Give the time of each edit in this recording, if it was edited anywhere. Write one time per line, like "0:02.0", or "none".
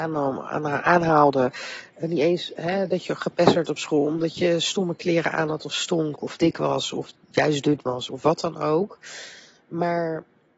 none